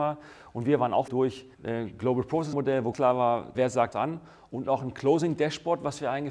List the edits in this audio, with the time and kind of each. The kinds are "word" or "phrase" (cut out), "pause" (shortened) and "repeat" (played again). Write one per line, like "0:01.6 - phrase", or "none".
0:01.1 - word
0:01.5 - word
0:02.5 - word
0:02.9 - word
0:03.5 - word
0:03.9 - word